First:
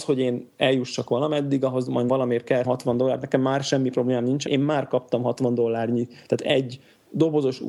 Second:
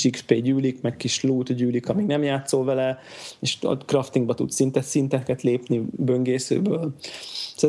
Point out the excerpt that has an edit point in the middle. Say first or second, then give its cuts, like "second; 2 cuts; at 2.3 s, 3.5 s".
first; 3 cuts; at 2.1 s, 2.6 s, 4.5 s